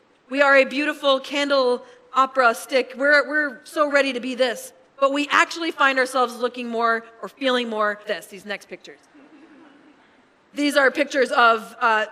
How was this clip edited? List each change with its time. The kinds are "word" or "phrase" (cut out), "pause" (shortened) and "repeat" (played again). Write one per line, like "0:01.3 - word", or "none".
0:08.0 - word